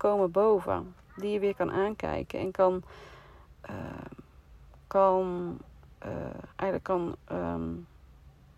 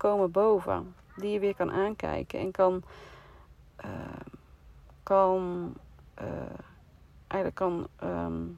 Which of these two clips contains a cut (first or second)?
first